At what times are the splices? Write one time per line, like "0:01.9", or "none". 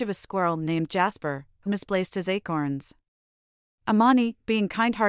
0:01.7